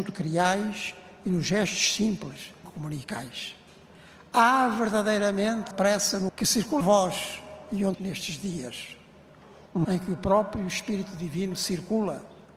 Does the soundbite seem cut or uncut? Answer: cut